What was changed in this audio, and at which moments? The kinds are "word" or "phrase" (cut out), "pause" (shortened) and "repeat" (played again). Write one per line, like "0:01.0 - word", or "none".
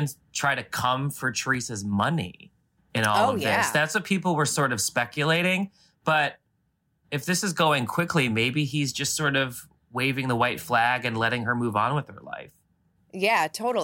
none